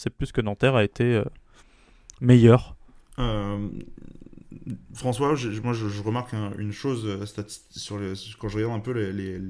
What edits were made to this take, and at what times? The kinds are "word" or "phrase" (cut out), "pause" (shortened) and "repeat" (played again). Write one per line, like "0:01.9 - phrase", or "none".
none